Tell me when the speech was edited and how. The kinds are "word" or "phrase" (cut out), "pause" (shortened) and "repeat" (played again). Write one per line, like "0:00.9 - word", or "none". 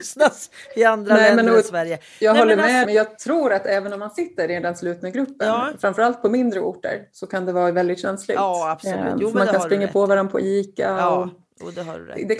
0:02.8 - word